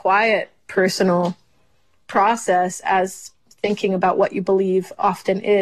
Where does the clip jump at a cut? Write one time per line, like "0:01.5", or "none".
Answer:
none